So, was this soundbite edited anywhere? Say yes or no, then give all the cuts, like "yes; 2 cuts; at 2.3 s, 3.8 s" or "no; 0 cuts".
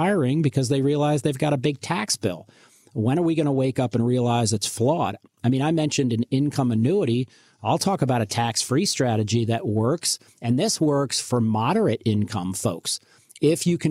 no; 0 cuts